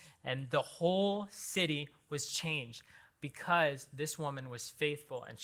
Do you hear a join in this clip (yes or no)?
no